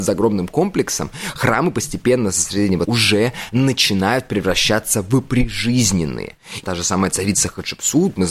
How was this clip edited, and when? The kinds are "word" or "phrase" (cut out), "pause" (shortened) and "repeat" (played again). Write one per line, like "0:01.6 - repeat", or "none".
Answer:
0:02.8 - word
0:06.6 - phrase